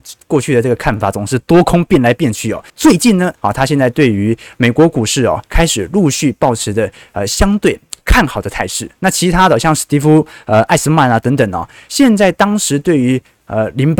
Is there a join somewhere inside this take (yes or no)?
yes